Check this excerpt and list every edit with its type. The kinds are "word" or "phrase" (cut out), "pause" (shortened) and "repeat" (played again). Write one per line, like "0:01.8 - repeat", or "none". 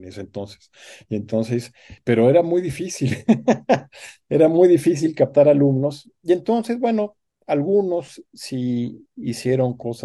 none

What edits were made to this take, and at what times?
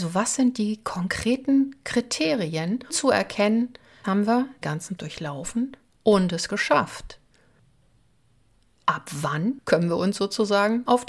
0:02.9 - word
0:04.0 - word
0:04.6 - word
0:05.0 - word

